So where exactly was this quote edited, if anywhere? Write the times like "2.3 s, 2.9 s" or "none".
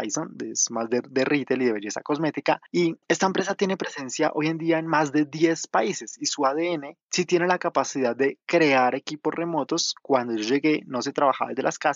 3.0 s